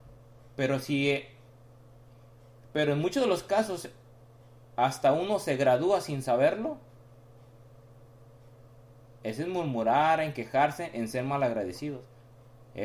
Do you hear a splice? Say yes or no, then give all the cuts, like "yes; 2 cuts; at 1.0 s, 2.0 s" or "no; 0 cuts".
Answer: no; 0 cuts